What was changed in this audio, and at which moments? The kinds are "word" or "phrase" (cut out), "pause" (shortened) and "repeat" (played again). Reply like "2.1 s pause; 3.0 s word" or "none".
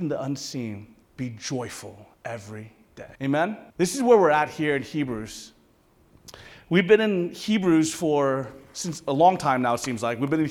1.0 s pause; 2.1 s pause; 3.2 s pause; 3.7 s pause